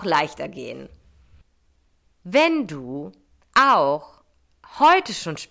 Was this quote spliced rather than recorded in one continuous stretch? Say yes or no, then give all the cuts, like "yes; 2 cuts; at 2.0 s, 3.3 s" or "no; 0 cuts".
no; 0 cuts